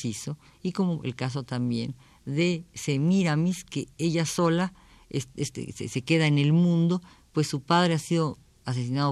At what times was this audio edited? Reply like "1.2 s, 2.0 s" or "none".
none